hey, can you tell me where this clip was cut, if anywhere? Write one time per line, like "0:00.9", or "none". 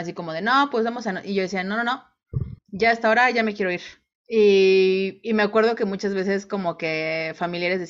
0:02.6
0:04.1